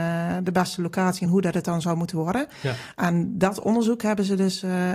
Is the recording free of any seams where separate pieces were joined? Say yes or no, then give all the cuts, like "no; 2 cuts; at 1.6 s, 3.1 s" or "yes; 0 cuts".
yes; 0 cuts